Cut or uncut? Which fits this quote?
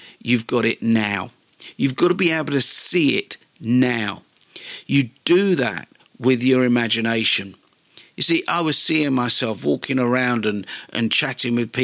uncut